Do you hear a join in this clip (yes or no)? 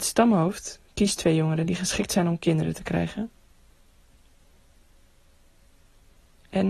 no